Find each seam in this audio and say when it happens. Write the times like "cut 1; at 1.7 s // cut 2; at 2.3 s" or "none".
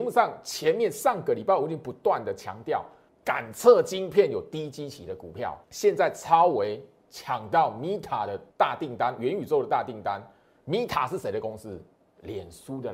cut 1; at 3.1 s // cut 2; at 5.6 s // cut 3; at 8.5 s